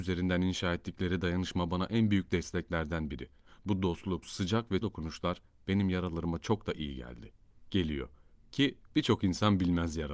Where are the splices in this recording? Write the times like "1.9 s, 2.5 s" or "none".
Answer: 4.2 s, 4.8 s, 8.8 s